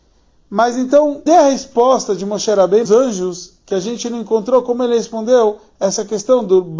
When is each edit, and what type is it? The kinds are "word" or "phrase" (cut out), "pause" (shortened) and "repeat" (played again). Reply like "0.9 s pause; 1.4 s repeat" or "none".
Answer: 1.3 s word; 2.8 s word

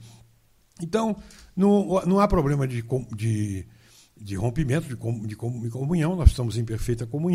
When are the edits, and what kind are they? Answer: none

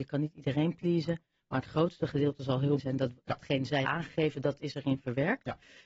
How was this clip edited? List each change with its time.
2.8 s word; 3.8 s word

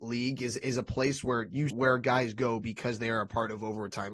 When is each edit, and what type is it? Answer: 1.7 s word

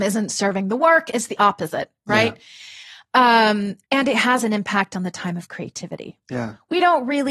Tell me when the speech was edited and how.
3.8 s pause

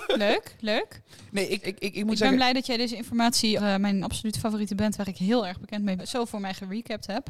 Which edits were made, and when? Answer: 1.6 s word; 3.6 s word; 4.0 s word; 6.0 s word

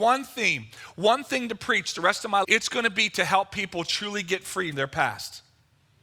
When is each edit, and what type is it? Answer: 2.4 s word; 4.7 s word

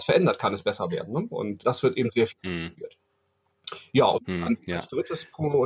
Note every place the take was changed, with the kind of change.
1.6 s word

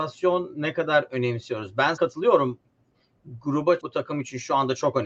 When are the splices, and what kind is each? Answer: 2.0 s word; 3.8 s word

